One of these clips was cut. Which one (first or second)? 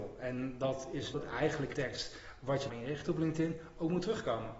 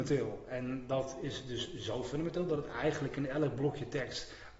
first